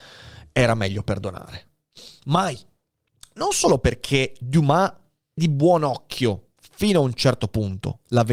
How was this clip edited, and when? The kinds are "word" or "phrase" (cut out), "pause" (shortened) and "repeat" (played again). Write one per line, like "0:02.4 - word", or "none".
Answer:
0:05.4 - word

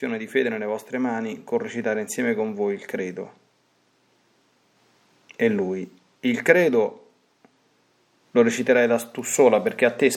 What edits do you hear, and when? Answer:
none

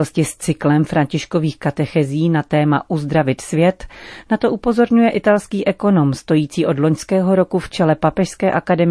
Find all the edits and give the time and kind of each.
none

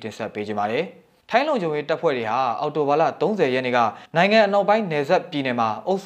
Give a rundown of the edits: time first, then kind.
0:04.1 - pause

